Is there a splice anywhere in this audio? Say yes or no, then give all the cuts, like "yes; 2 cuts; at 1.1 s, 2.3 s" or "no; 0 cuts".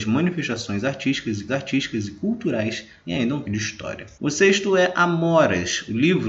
yes; 3 cuts; at 1.5 s, 3.4 s, 4.1 s